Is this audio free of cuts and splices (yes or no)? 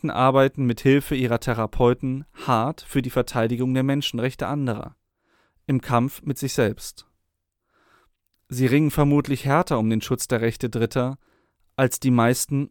yes